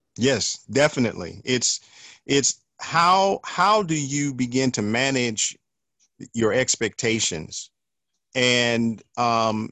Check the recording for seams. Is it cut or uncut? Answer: uncut